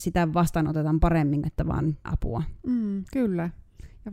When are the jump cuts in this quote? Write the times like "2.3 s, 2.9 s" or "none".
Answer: 1.4 s, 2.1 s